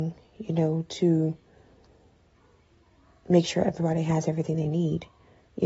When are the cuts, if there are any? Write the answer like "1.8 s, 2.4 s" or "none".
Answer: none

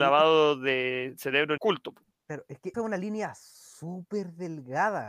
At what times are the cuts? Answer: 1.6 s, 2.1 s, 2.7 s

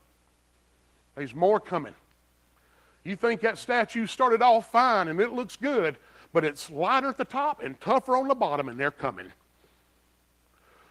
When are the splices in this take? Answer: none

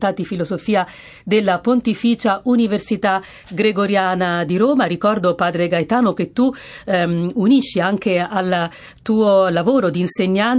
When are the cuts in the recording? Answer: none

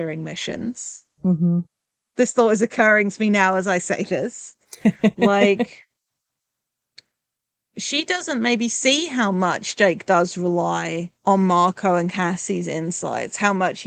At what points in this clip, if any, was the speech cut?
1.1 s, 11.1 s

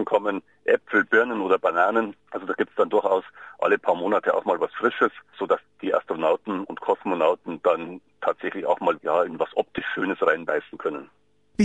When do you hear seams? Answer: 2.2 s, 5.6 s, 9.0 s

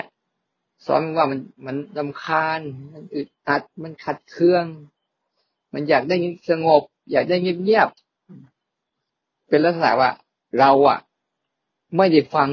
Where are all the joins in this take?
1.5 s

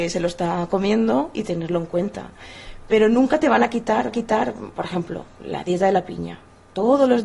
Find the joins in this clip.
4.1 s

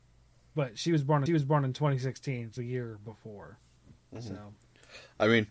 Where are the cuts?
1.3 s, 2.6 s

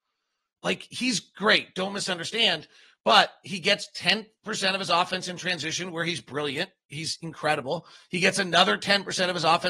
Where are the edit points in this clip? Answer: none

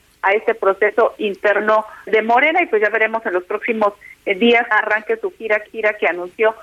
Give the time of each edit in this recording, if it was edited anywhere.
2.1 s, 4.7 s, 5.7 s

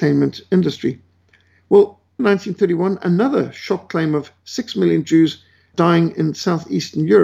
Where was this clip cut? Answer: 2.2 s, 5.7 s

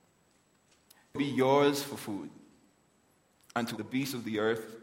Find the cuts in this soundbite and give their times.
1.2 s, 3.8 s

